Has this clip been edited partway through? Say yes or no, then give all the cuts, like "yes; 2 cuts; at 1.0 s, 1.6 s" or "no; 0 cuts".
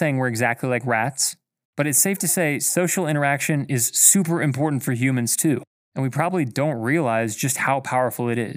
no; 0 cuts